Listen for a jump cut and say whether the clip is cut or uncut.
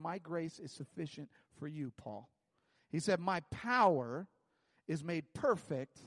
uncut